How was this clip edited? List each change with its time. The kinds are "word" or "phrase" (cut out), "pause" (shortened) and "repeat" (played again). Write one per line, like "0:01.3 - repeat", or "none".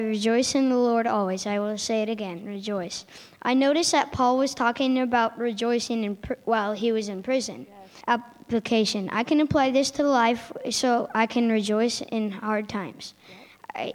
0:08.0 - pause